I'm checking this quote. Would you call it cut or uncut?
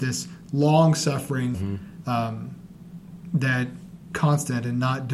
cut